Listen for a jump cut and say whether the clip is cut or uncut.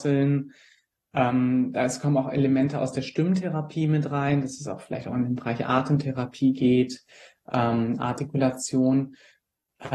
uncut